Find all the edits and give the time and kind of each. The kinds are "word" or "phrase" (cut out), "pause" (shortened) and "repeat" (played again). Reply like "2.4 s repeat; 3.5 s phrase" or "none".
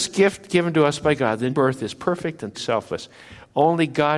1.5 s word; 2.5 s word